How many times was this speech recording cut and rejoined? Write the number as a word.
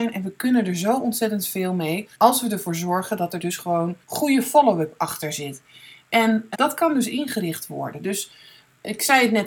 three